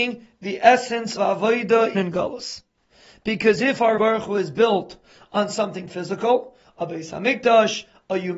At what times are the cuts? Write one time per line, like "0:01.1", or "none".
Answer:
0:01.2
0:01.9
0:04.0